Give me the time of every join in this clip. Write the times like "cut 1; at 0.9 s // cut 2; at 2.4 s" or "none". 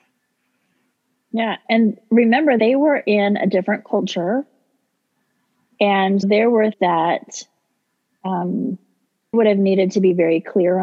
cut 1; at 2.6 s // cut 2; at 6.2 s // cut 3; at 6.7 s // cut 4; at 9.3 s